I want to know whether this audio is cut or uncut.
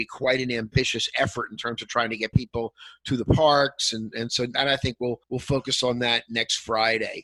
cut